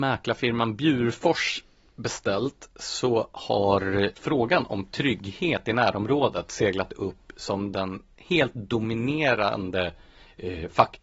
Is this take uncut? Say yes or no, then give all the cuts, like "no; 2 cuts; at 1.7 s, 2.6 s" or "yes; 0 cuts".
no; 1 cut; at 4.1 s